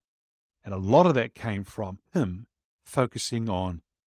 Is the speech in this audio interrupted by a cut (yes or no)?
yes